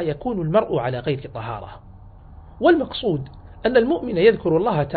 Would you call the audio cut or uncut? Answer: uncut